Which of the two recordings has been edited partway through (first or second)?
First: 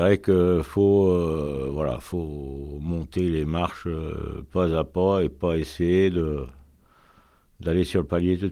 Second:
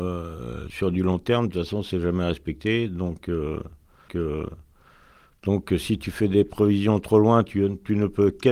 second